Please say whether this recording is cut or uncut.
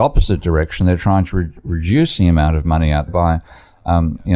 cut